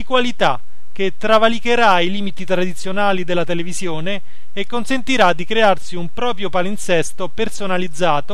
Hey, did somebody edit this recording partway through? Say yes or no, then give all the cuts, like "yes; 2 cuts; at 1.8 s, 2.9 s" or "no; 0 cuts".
no; 0 cuts